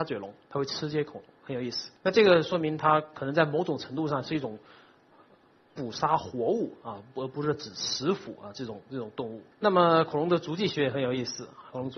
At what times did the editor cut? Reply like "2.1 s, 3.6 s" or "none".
2.0 s, 9.5 s